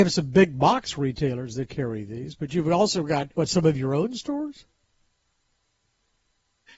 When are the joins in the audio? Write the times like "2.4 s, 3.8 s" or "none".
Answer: 3.3 s